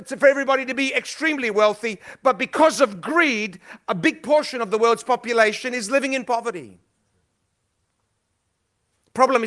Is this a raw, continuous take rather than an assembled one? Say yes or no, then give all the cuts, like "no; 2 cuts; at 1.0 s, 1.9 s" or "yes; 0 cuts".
yes; 0 cuts